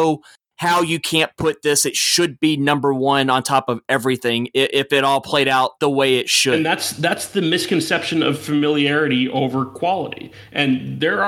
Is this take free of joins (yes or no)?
no